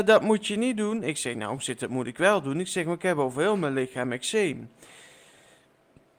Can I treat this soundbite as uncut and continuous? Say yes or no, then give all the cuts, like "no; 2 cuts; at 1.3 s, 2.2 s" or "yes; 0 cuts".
yes; 0 cuts